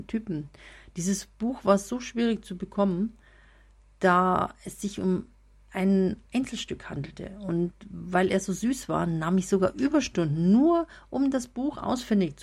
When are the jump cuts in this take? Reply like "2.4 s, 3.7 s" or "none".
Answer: none